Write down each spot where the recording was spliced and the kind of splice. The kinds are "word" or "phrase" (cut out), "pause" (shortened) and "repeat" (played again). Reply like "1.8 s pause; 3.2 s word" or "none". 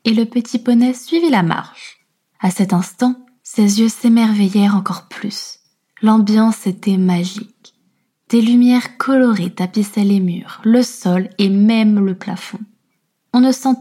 none